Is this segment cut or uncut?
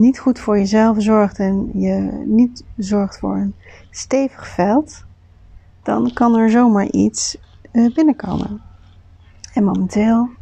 uncut